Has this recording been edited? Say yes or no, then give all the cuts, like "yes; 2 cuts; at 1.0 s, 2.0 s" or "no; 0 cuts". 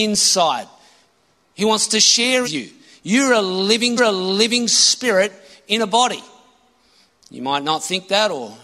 yes; 2 cuts; at 2.4 s, 4.0 s